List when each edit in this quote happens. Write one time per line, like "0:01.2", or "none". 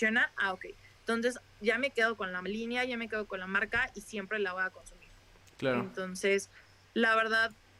none